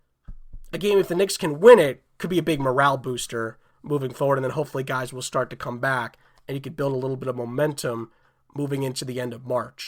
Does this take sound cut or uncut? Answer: uncut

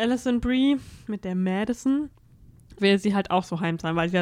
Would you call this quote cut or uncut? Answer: cut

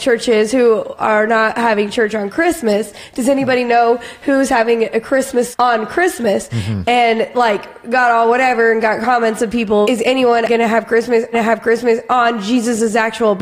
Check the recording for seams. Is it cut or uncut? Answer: cut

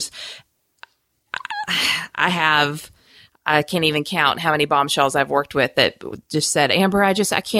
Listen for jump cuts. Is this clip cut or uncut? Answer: uncut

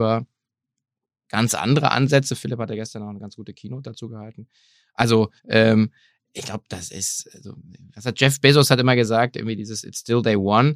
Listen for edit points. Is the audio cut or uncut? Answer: cut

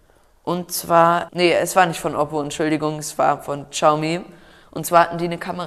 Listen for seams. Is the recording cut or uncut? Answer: cut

